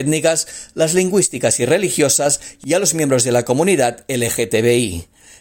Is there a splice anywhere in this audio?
no; 0 cuts

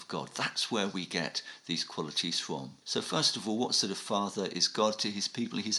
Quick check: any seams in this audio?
yes; 1 cut; at 2.8 s

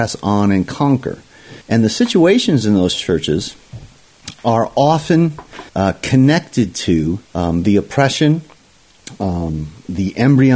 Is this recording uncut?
no; 3 cuts; at 1.6 s, 5.7 s, 7.2 s

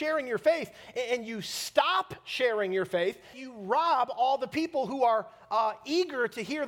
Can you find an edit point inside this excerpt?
yes; 1 cut; at 3.3 s

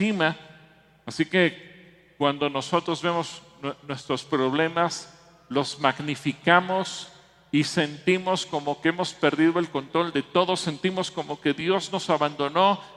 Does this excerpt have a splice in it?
no; 0 cuts

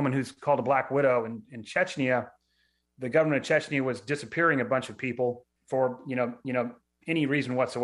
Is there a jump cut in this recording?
yes; 2 cuts; at 5.6 s, 6.4 s

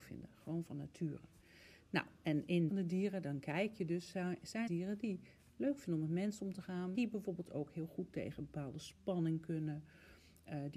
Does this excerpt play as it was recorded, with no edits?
no; 3 cuts; at 2.7 s, 4.7 s, 6.9 s

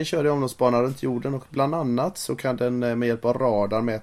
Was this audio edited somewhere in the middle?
no; 0 cuts

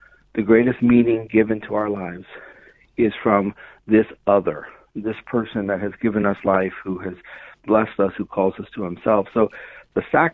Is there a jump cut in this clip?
no; 0 cuts

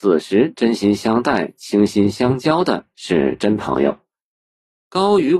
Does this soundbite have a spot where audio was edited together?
no; 0 cuts

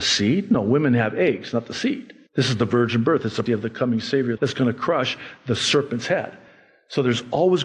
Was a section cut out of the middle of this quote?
yes; 3 cuts; at 2.3 s, 3.5 s, 4.4 s

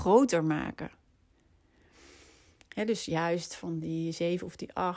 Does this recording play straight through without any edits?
yes; 0 cuts

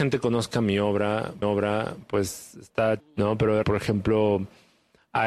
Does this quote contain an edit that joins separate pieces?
yes; 3 cuts; at 1.4 s, 3.0 s, 3.6 s

